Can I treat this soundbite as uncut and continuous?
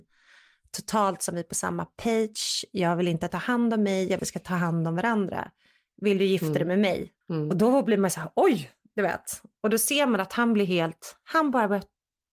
no; 3 cuts; at 3.3 s, 4.2 s, 7.2 s

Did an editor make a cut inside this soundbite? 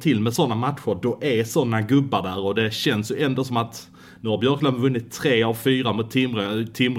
no; 0 cuts

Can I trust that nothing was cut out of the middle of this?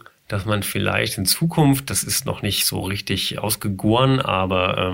yes; 0 cuts

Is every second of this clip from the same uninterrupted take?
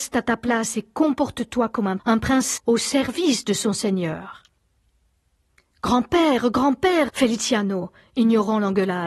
no; 3 cuts; at 2.0 s, 2.6 s, 7.1 s

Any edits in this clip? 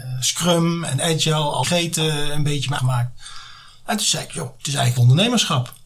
yes; 4 cuts; at 1.6 s, 2.8 s, 4.6 s, 5.0 s

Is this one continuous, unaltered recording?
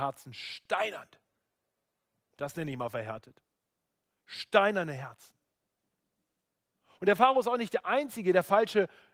yes; 0 cuts

